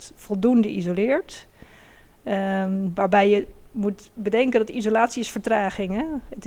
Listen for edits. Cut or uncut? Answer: uncut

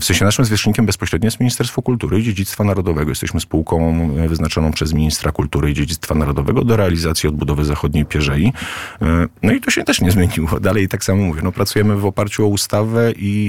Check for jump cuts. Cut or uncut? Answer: uncut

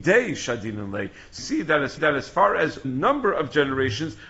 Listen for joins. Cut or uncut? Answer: cut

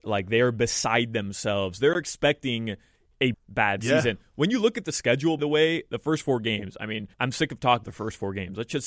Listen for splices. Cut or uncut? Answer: cut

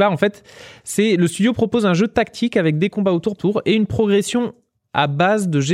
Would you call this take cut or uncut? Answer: cut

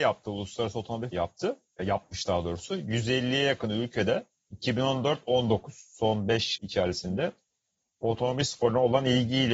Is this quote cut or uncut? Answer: cut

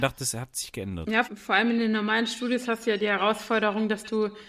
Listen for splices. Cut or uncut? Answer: cut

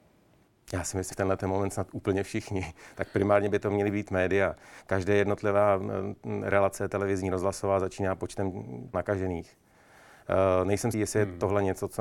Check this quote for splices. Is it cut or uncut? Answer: cut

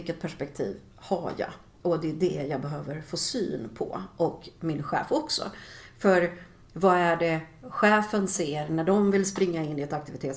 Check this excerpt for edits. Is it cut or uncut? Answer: uncut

